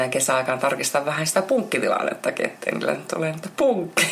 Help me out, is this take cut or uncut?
uncut